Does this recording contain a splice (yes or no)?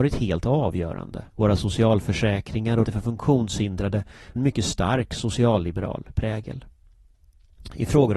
yes